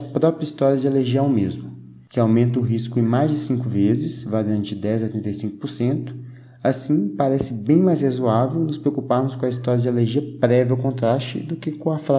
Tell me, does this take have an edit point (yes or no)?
no